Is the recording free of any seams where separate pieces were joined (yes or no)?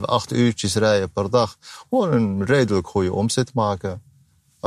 yes